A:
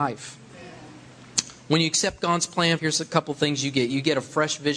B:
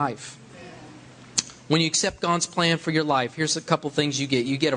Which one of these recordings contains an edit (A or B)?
A